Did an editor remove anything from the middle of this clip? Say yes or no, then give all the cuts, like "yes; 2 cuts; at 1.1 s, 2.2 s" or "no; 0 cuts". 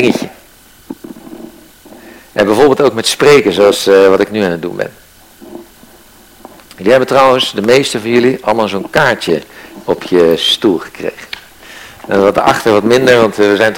no; 0 cuts